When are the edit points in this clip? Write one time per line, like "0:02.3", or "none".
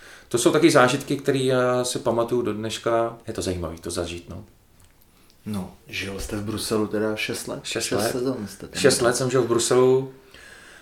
0:03.2
0:05.8